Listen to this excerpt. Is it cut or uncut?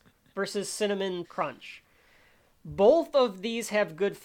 cut